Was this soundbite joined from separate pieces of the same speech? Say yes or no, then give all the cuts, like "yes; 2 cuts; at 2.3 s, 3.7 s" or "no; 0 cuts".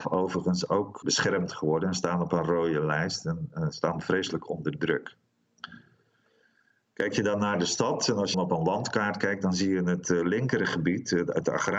yes; 2 cuts; at 1.0 s, 8.3 s